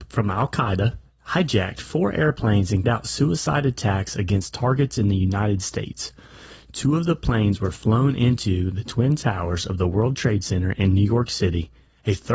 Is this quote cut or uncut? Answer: cut